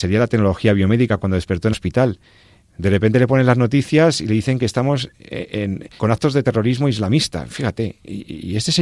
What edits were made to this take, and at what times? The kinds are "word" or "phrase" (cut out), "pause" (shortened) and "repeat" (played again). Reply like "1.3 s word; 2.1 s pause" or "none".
1.7 s word; 6.0 s word